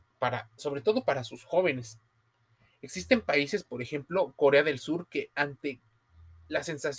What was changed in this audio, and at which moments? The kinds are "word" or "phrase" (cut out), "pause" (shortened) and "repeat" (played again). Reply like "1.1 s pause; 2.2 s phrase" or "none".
none